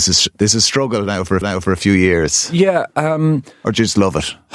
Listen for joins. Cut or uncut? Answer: cut